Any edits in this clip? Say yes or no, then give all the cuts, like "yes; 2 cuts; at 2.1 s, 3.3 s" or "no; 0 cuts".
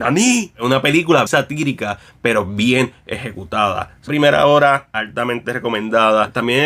yes; 2 cuts; at 1.3 s, 4.1 s